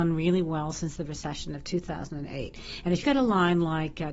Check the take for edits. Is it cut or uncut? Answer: cut